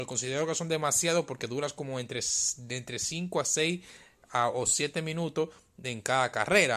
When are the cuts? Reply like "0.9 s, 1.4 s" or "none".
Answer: none

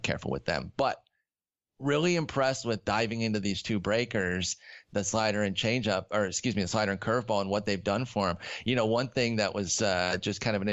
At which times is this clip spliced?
none

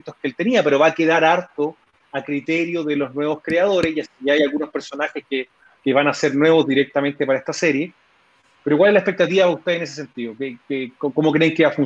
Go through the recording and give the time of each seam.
none

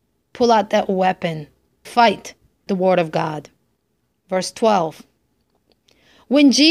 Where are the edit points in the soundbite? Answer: 1.8 s, 2.7 s, 4.0 s

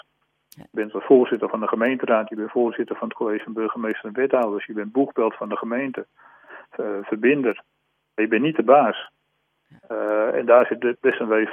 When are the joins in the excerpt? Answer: none

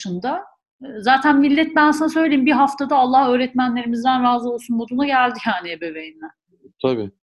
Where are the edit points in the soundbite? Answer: none

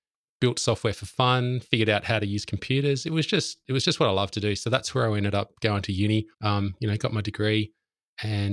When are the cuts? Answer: 6.3 s

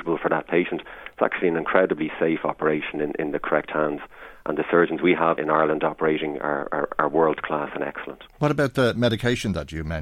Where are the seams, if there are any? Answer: 5.4 s

